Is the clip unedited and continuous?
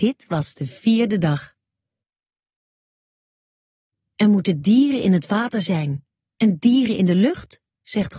yes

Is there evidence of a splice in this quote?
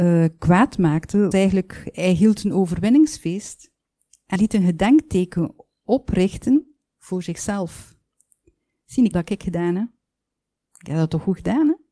yes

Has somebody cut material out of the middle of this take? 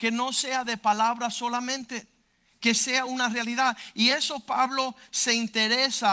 no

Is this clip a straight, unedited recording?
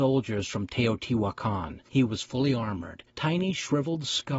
no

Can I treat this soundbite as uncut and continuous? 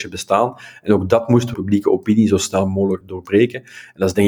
no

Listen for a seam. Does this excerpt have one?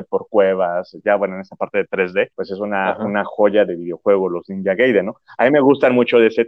yes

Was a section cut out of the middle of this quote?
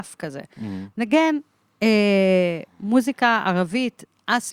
no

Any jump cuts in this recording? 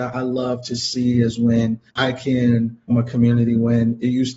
yes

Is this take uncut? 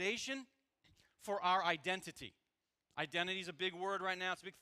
no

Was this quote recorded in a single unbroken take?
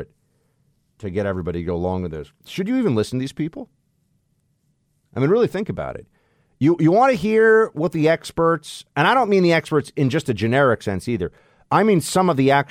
yes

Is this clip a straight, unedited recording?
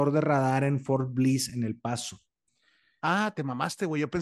yes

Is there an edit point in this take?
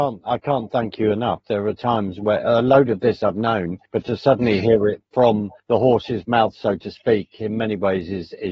yes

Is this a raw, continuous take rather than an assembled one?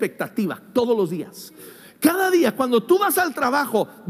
yes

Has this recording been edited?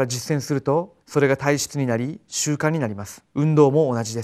yes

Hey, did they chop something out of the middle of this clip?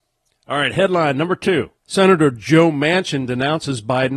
yes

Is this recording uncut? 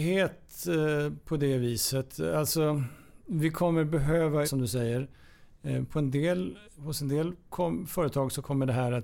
no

